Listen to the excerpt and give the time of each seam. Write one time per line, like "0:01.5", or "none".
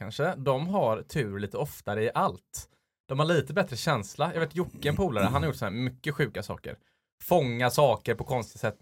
none